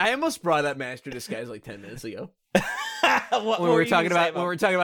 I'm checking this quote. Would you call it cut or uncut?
uncut